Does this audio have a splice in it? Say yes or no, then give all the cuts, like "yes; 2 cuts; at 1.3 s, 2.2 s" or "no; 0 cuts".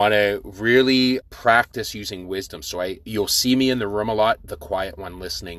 yes; 1 cut; at 1.2 s